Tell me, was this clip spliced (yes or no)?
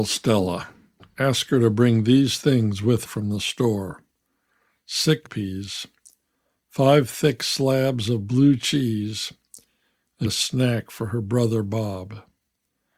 yes